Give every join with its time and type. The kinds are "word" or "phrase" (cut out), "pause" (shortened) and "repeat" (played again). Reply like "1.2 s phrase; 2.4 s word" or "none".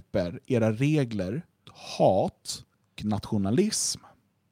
1.7 s word; 3.0 s word